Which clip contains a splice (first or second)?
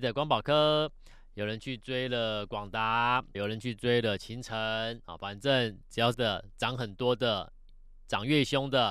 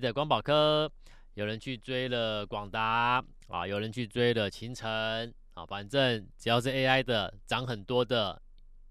first